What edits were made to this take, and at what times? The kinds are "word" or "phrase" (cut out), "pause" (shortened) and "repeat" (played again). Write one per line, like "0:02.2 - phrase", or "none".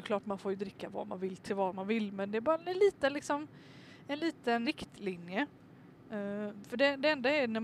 0:04.6 - word